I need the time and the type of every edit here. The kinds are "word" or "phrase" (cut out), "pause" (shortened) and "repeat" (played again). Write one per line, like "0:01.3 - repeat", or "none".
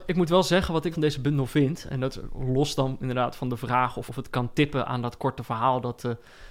0:00.9 - word
0:04.1 - word

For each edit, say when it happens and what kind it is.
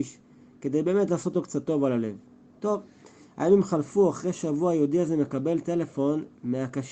none

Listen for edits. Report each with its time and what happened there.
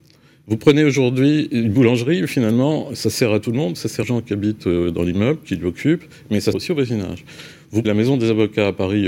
0:04.0 - word
0:06.5 - word
0:07.8 - word

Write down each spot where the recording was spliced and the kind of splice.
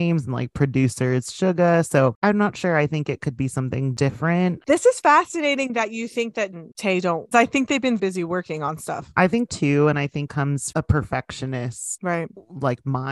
0:06.5 - word
0:07.3 - word
0:08.0 - word
0:09.5 - word
0:10.3 - word
0:10.7 - word

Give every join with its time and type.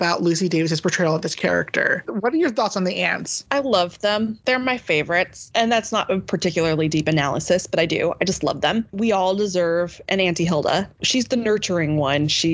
none

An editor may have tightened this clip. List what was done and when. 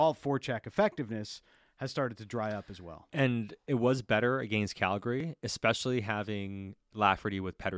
none

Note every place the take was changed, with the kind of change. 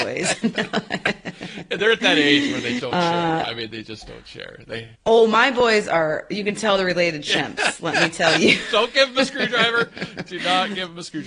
0:02.8 - word
0:04.9 - pause

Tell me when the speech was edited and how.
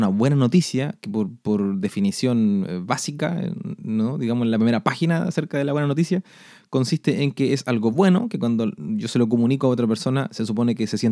none

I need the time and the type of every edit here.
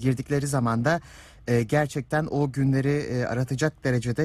none

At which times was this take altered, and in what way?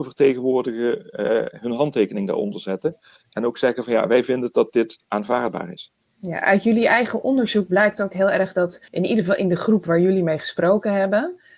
0:08.9 - pause

